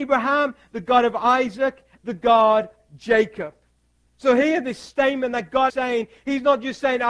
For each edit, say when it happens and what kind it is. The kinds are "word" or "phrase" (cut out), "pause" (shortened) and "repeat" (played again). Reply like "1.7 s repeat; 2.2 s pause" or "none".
2.0 s word; 2.8 s word; 3.8 s pause; 5.7 s word